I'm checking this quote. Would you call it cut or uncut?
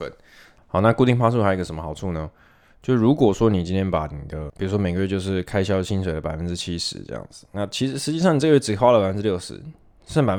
uncut